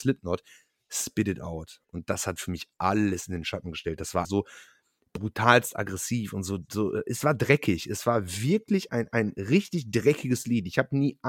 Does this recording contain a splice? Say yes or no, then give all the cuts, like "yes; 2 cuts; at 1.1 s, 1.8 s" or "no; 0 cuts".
yes; 2 cuts; at 4.2 s, 8.9 s